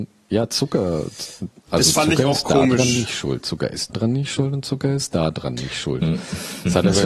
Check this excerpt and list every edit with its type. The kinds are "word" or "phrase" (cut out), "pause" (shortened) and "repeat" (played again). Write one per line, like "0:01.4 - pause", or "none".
0:03.9 - word